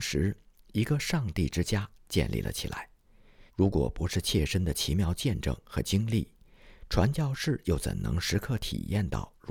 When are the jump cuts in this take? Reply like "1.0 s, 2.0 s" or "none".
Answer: 3.5 s